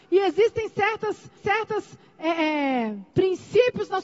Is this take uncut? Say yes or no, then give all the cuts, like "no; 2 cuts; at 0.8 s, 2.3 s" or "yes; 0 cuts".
no; 2 cuts; at 1.4 s, 3.1 s